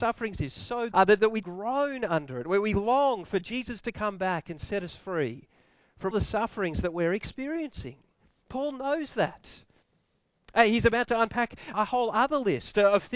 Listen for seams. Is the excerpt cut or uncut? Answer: cut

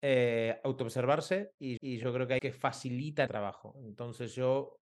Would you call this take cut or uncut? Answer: cut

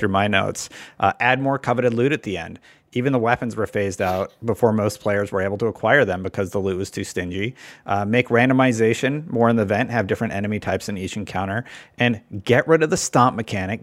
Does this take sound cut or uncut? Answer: uncut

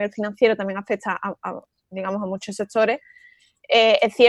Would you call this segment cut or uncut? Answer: uncut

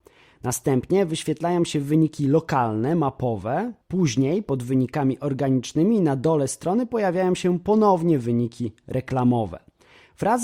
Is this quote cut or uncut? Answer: cut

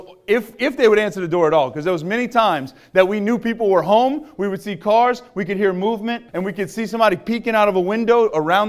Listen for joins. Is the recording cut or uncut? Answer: cut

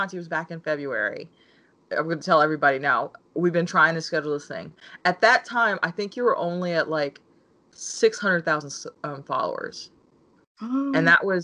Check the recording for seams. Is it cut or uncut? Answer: uncut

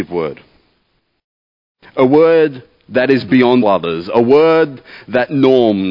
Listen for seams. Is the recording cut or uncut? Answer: cut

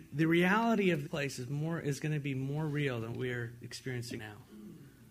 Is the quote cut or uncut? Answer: cut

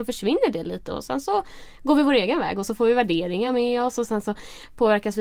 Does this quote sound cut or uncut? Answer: uncut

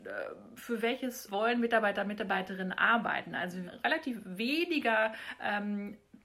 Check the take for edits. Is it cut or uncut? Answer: cut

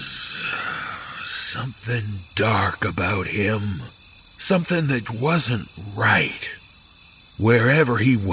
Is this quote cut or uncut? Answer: cut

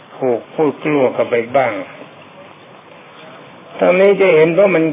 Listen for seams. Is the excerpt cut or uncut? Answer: uncut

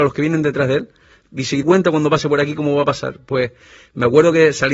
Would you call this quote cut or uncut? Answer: cut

